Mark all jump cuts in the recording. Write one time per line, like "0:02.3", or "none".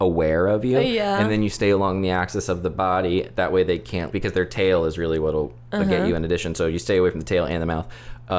0:04.1